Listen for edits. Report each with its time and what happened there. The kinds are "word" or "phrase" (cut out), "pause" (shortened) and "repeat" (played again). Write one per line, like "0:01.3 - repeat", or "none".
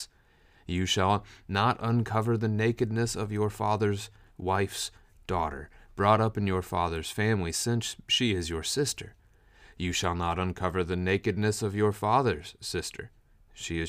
none